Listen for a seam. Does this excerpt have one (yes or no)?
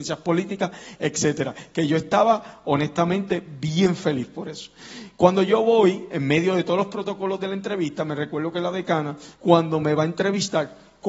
yes